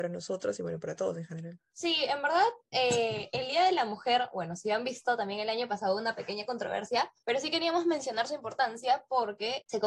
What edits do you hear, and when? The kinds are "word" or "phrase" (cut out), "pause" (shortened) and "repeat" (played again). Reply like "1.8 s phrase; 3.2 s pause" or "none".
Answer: 7.2 s pause